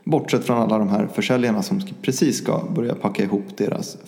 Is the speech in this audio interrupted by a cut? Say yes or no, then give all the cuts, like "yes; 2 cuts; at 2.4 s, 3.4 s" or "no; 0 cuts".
no; 0 cuts